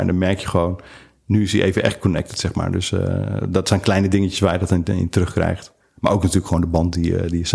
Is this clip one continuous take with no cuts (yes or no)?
yes